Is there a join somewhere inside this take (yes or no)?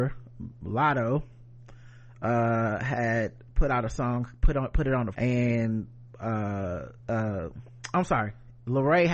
yes